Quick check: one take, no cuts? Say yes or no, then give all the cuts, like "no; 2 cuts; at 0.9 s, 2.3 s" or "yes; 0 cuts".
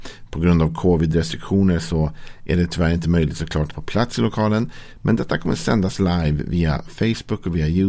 no; 1 cut; at 3.7 s